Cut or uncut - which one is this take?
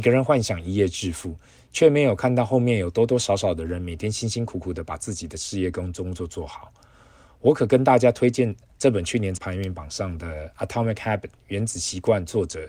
cut